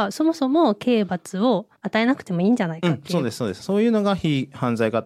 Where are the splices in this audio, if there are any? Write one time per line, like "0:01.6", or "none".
0:01.8